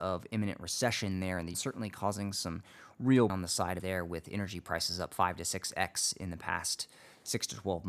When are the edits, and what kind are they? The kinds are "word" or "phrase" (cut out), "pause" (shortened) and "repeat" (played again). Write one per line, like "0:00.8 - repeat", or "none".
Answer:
0:01.5 - word
0:03.3 - word
0:03.8 - word